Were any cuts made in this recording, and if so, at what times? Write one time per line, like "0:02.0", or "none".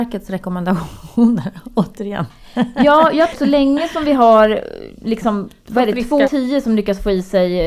0:03.3
0:06.2